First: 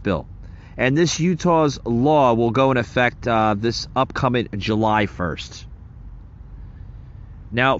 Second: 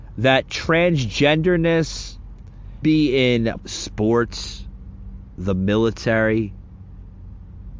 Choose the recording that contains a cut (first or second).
second